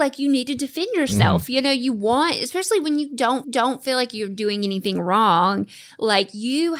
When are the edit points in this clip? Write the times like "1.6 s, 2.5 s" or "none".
3.4 s